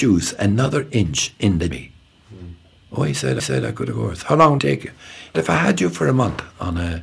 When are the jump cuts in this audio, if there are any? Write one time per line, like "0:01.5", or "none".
0:01.7
0:03.4
0:04.6
0:05.3